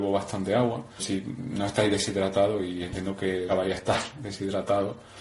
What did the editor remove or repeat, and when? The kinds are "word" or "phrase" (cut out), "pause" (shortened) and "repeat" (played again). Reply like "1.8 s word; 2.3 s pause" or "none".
1.0 s word; 3.5 s word